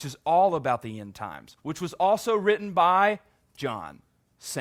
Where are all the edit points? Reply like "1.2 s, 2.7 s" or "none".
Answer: none